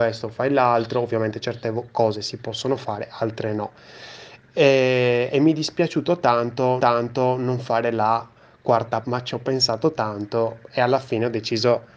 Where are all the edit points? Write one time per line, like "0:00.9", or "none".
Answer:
0:06.8
0:09.0